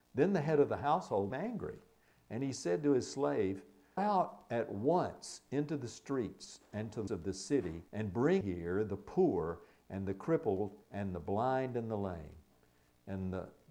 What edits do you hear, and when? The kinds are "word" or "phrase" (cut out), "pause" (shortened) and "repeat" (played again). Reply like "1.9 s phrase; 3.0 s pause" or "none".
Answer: 1.3 s word; 4.0 s word; 7.1 s word; 7.9 s pause; 8.4 s word; 10.8 s pause